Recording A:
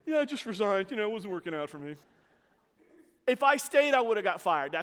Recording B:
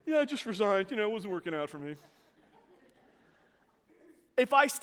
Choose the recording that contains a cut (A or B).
A